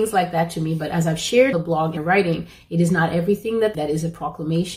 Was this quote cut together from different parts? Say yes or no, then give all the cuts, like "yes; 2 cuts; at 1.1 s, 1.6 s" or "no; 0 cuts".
yes; 3 cuts; at 1.5 s, 2.0 s, 3.7 s